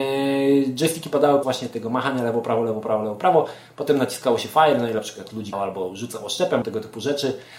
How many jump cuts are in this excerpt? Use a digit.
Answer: 3